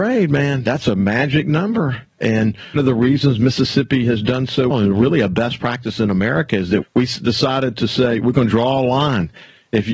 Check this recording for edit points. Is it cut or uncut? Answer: cut